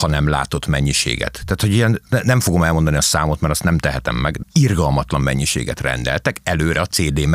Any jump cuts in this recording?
yes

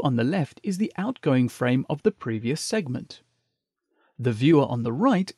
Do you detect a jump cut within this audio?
no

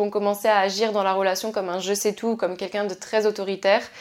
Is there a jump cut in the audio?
no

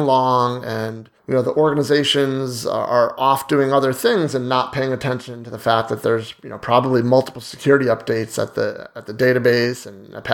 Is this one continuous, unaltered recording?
no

